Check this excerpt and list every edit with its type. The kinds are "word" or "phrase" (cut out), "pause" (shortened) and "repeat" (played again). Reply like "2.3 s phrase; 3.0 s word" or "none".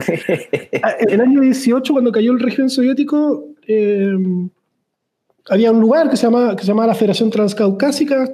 1.1 s word